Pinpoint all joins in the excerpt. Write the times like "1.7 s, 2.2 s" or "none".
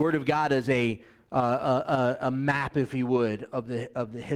none